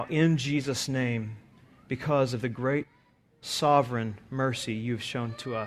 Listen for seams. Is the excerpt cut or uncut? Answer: uncut